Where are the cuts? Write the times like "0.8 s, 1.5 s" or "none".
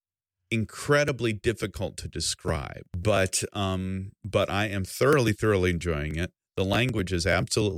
2.9 s

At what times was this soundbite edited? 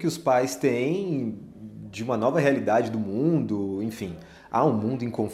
none

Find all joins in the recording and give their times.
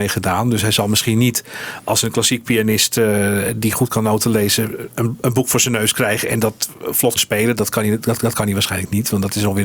7.2 s, 8.2 s

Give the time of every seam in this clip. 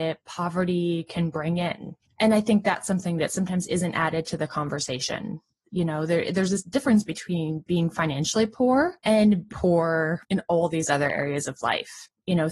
9.5 s

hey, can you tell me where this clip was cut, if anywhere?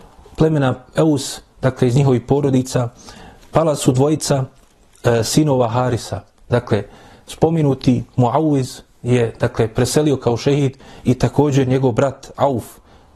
none

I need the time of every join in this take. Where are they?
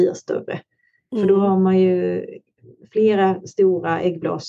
none

